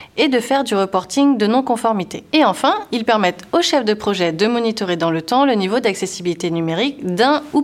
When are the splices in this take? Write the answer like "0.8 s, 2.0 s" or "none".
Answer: none